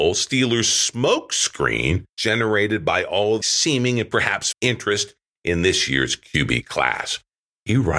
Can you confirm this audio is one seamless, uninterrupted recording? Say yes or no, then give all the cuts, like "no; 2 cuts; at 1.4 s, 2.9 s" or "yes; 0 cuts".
no; 3 cuts; at 2.1 s, 3.4 s, 4.5 s